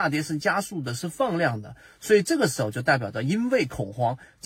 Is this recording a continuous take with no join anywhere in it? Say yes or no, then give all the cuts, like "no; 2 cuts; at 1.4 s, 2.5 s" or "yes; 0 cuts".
yes; 0 cuts